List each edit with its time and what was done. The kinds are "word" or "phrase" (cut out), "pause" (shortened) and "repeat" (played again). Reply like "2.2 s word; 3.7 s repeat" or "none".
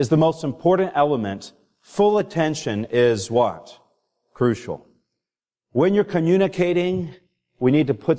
none